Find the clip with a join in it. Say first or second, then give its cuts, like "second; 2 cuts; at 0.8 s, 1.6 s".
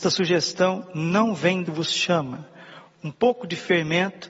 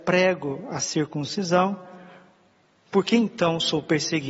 first; 1 cut; at 1.6 s